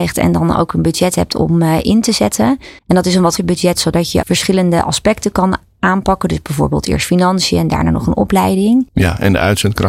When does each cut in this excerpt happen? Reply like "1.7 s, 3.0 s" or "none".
2.8 s, 3.4 s, 4.2 s